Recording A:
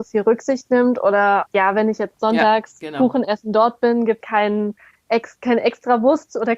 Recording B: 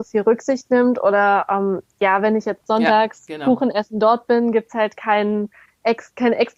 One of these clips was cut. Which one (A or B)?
A